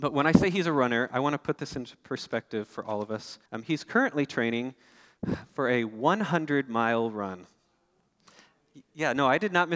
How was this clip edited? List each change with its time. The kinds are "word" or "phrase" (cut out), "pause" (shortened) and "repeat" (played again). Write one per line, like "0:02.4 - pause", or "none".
0:03.5 - pause